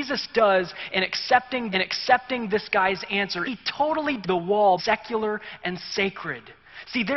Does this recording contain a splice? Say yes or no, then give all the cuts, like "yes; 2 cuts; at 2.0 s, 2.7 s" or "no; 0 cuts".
yes; 4 cuts; at 1.7 s, 3.4 s, 4.2 s, 4.8 s